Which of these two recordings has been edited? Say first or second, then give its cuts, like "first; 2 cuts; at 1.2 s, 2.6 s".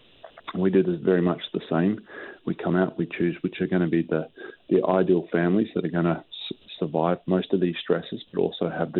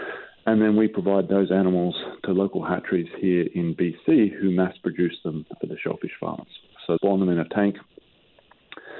second; 2 cuts; at 5.6 s, 7.0 s